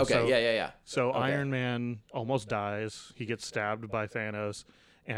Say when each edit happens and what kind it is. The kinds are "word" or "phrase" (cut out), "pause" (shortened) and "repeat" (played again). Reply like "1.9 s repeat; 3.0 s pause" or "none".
2.0 s pause

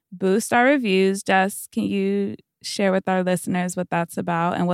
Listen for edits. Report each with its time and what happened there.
none

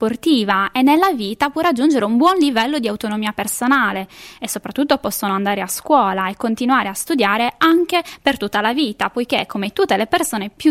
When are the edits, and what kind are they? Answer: none

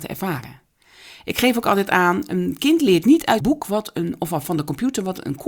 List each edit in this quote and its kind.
3.4 s word

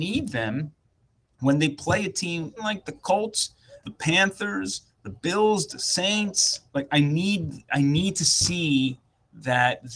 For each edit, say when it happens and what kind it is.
2.6 s word; 3.8 s word; 6.7 s pause

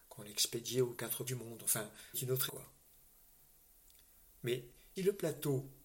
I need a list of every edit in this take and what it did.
1.3 s word; 2.1 s word; 2.5 s word; 5.0 s word

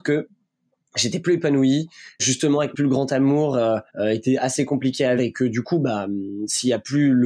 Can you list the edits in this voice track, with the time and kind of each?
2.2 s word; 2.7 s phrase; 3.9 s pause; 5.2 s word

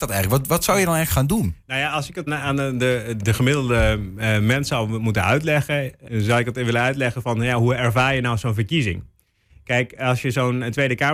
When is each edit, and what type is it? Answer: 2.3 s word; 3.2 s word; 6.1 s word

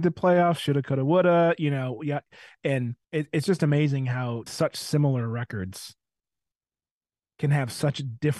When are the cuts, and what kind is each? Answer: 3.0 s pause; 4.5 s phrase

